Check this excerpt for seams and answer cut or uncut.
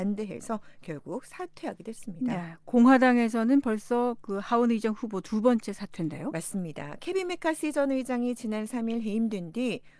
uncut